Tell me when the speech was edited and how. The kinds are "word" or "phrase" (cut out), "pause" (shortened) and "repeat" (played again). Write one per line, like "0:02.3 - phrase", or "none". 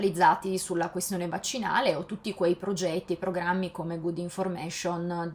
none